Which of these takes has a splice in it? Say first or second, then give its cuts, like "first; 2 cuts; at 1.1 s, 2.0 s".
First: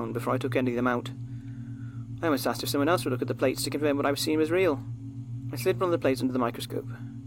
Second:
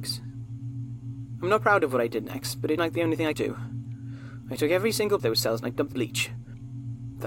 second; 4 cuts; at 2.8 s, 3.3 s, 5.2 s, 5.9 s